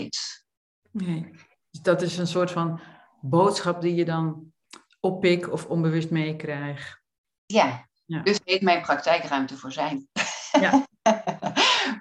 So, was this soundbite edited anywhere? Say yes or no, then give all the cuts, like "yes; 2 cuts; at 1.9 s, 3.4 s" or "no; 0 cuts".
no; 0 cuts